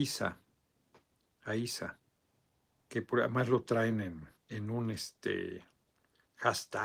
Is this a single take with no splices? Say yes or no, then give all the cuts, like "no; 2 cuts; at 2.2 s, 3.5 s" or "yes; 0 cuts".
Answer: no; 2 cuts; at 2.2 s, 4.4 s